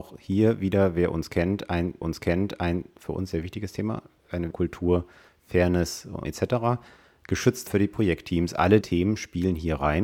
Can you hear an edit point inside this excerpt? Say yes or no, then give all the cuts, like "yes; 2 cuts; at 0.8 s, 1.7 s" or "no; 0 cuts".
yes; 5 cuts; at 2.0 s, 4.5 s, 6.2 s, 7.7 s, 8.8 s